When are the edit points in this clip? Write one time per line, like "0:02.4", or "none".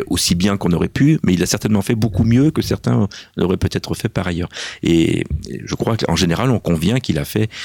none